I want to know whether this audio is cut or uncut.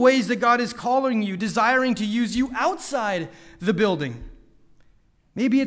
uncut